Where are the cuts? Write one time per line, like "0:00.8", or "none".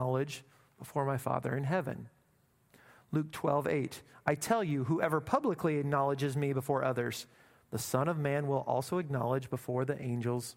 none